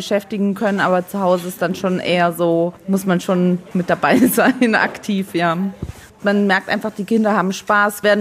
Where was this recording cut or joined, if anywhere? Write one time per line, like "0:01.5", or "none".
none